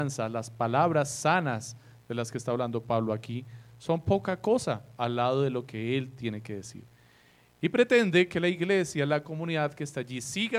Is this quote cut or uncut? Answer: uncut